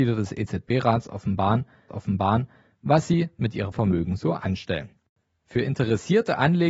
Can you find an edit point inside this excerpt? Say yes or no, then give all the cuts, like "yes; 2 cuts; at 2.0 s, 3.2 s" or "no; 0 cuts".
yes; 2 cuts; at 1.9 s, 3.7 s